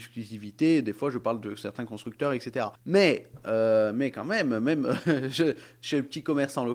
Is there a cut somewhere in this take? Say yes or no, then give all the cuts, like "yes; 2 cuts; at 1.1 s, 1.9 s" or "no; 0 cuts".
yes; 1 cut; at 2.8 s